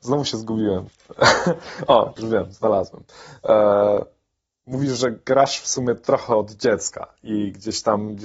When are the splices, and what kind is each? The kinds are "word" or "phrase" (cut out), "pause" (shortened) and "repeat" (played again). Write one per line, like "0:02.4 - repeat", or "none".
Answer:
none